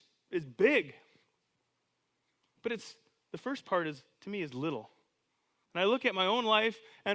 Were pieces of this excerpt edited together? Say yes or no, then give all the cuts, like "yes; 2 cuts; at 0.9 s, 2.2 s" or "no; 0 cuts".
no; 0 cuts